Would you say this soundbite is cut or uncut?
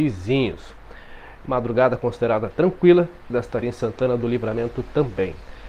cut